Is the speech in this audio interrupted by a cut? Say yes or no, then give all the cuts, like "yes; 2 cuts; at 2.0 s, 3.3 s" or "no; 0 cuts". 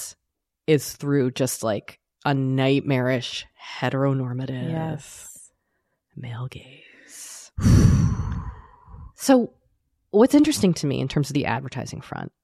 no; 0 cuts